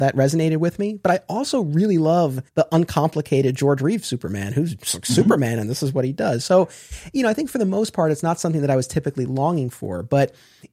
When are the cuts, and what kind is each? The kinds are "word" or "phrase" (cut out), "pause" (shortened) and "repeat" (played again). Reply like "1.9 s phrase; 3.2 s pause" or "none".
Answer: 2.5 s pause